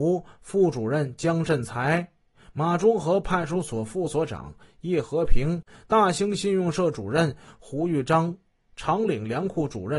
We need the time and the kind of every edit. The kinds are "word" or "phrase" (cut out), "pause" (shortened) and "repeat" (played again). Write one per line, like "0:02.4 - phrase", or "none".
none